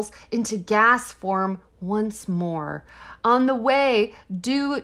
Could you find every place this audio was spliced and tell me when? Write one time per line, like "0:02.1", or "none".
none